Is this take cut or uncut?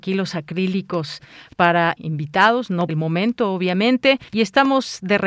cut